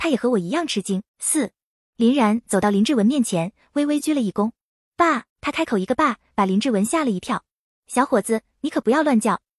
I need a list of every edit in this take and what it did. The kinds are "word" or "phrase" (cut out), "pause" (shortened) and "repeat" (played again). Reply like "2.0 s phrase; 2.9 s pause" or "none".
1.1 s pause; 5.3 s pause